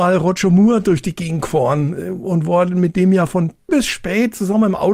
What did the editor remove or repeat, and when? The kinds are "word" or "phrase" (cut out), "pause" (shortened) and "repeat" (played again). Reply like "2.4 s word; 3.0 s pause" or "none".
3.7 s word